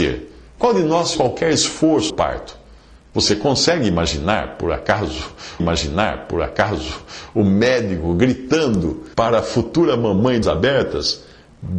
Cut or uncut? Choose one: cut